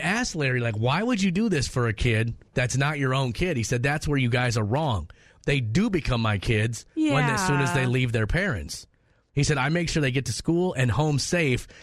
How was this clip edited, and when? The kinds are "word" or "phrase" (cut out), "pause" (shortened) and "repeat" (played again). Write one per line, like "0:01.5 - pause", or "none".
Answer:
none